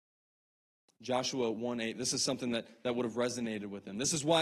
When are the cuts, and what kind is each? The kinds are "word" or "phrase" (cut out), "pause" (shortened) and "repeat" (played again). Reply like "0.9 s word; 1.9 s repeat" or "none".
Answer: none